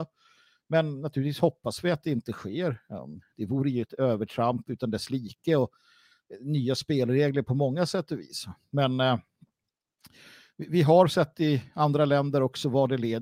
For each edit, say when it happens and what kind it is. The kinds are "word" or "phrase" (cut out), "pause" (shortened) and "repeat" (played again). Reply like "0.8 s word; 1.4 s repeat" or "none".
none